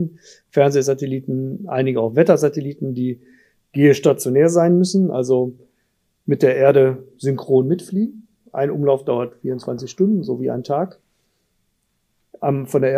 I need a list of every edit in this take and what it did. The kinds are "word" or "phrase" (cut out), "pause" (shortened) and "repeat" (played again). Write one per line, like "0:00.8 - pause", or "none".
none